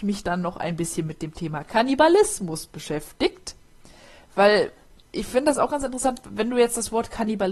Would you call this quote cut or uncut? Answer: uncut